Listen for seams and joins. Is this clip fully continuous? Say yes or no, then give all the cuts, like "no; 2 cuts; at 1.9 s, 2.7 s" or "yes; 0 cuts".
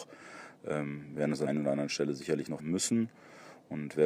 no; 2 cuts; at 1.5 s, 2.6 s